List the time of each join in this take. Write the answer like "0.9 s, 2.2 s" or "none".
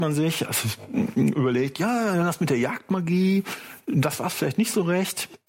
none